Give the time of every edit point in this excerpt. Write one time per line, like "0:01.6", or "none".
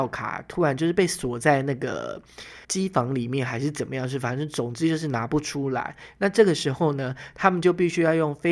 0:02.6